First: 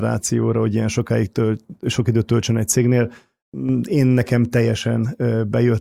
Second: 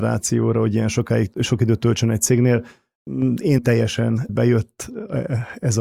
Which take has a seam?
second; 3 cuts; at 1.3 s, 3.6 s, 4.3 s

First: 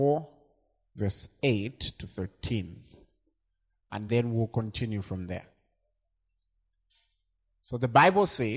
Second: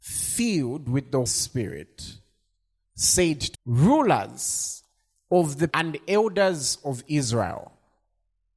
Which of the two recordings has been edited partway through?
second; 3 cuts; at 1.3 s, 3.5 s, 5.7 s

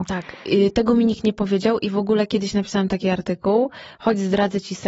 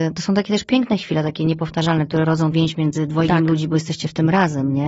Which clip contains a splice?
second; 1 cut; at 2.5 s

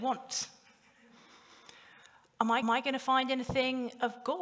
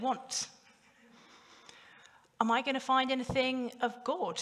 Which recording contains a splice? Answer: first; 1 cut; at 2.6 s

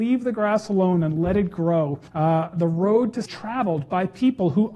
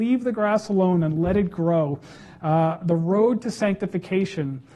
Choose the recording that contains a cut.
first; 2 cuts; at 2.1 s, 3.3 s

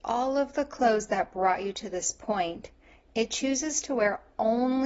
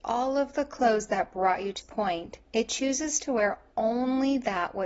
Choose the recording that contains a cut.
second; 2 cuts; at 1.8 s, 2.4 s

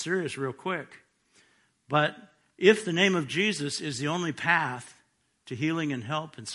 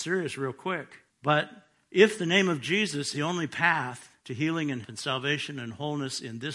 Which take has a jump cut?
second; 4 cuts; at 1.1 s, 3.1 s, 4.2 s, 4.8 s

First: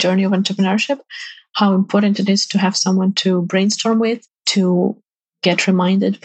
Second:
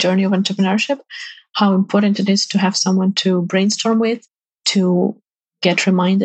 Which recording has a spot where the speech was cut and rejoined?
first; 1 cut; at 4.4 s

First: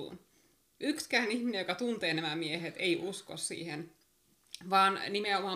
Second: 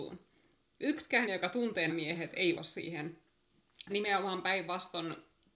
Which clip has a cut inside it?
second; 4 cuts; at 1.3 s, 1.9 s, 2.6 s, 3.9 s

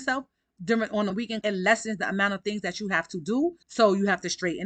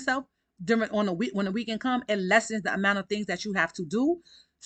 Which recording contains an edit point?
first; 3 cuts; at 1.1 s, 1.4 s, 3.6 s

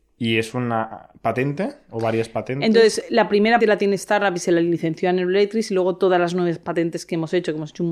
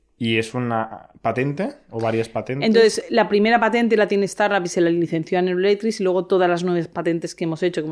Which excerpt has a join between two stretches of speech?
first; 1 cut; at 3.6 s

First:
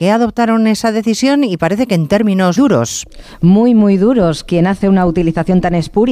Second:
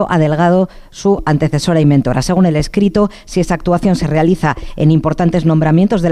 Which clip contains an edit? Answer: first; 1 cut; at 2.6 s

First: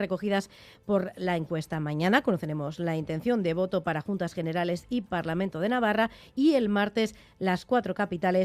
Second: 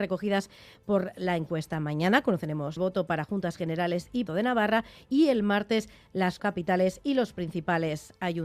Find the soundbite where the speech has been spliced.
second; 3 cuts; at 2.8 s, 4.3 s, 6.4 s

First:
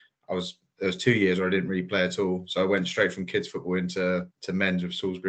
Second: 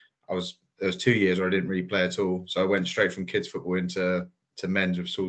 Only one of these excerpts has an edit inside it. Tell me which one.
first; 1 cut; at 4.3 s

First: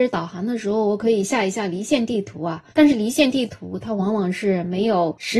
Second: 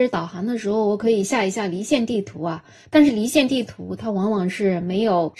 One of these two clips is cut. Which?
first; 1 cut; at 2.7 s

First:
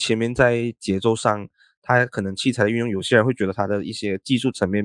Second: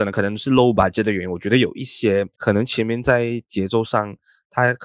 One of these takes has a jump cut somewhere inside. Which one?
second; 1 cut; at 2.3 s

